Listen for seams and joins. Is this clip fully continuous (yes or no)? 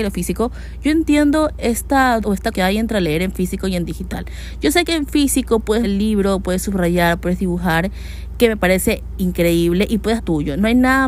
no